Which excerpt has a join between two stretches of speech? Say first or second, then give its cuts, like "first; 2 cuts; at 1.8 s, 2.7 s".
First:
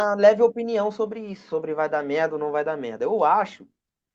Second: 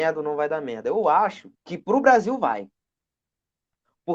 second; 1 cut; at 1.5 s